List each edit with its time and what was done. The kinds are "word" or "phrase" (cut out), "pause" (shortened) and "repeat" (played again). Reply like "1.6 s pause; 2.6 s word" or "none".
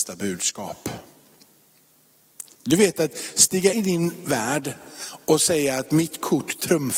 2.5 s pause; 3.7 s word